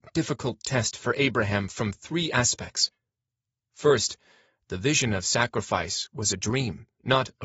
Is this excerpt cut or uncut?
uncut